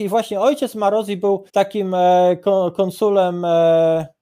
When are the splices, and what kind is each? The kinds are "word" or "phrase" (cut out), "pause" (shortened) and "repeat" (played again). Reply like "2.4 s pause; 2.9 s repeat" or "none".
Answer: 1.5 s pause

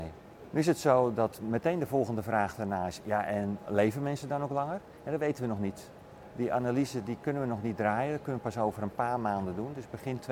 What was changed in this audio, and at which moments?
none

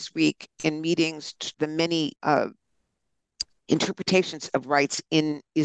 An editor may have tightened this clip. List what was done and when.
1.5 s phrase; 2.2 s pause; 4.6 s word

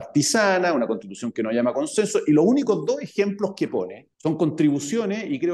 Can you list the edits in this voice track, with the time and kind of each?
4.1 s pause

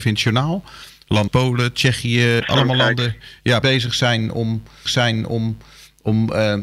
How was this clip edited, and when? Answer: 1.3 s word; 2.4 s word; 3.6 s phrase; 4.9 s repeat

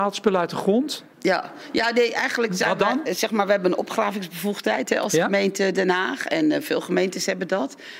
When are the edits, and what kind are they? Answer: 1.1 s pause

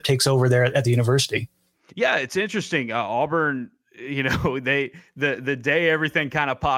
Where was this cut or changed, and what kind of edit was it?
none

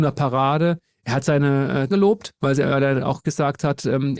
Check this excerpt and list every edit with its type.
1.9 s word; 2.4 s pause; 3.2 s word

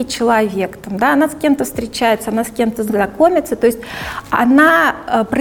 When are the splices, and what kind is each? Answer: none

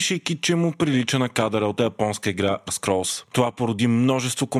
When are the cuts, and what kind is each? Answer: 1.8 s word; 2.7 s word

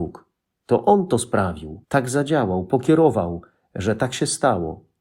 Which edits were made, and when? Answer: 1.8 s pause

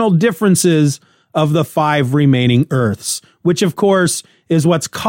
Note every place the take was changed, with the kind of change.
none

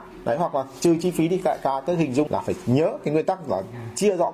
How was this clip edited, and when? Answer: 2.3 s word

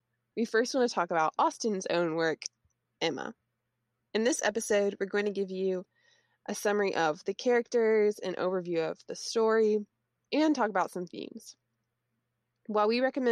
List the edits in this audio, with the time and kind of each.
none

